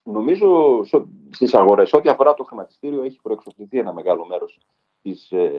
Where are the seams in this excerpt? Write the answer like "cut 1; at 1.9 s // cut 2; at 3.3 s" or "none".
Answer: none